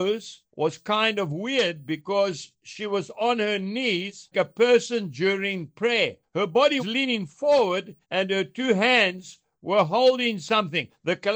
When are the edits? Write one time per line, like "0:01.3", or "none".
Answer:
0:04.3
0:06.8
0:08.0

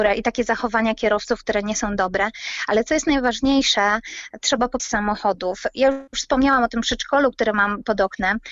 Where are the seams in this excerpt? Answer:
0:04.8
0:06.1

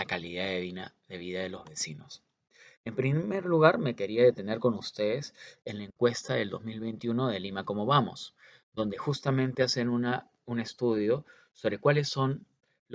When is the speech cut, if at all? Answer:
none

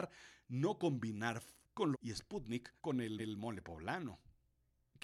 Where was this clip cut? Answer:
0:01.6
0:01.9
0:02.8
0:03.2

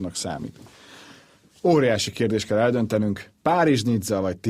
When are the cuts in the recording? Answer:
0:03.4

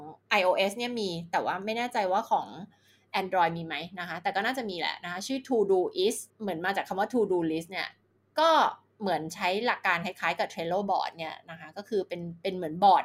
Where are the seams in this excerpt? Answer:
none

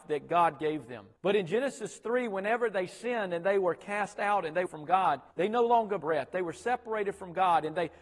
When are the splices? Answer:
0:01.2
0:04.7
0:05.3
0:06.0

